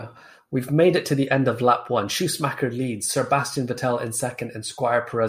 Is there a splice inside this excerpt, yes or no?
no